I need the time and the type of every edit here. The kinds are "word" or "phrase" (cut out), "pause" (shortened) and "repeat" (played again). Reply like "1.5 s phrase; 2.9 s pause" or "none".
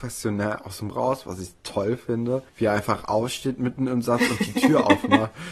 0.9 s word; 2.5 s pause